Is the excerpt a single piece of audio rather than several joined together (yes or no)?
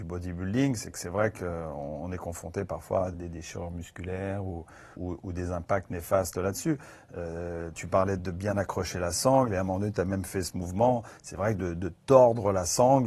no